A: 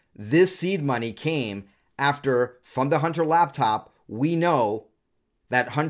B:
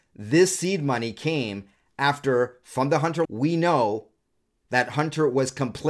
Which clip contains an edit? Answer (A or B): B